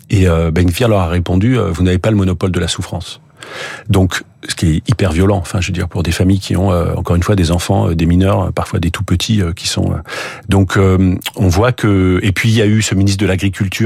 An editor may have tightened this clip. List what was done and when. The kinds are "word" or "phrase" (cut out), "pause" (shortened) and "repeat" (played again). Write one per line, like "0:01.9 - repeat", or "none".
none